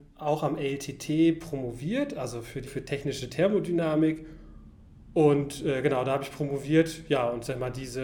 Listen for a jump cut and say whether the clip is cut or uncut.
cut